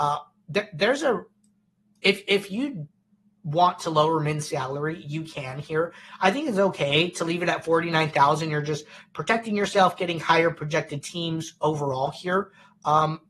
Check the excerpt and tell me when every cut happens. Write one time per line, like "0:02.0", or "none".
none